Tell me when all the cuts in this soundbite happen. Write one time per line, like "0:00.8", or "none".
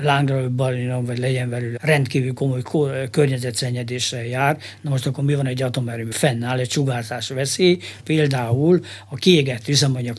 0:01.8
0:06.1
0:08.0